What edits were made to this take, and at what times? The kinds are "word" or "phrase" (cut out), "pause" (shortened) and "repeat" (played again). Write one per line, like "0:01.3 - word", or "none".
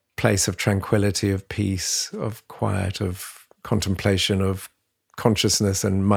none